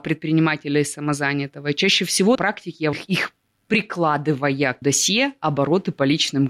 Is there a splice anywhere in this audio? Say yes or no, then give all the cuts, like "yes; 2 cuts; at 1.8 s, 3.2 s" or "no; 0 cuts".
yes; 3 cuts; at 2.3 s, 2.9 s, 4.8 s